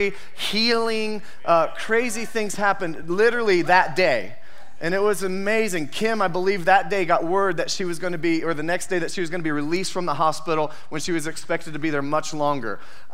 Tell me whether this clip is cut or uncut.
uncut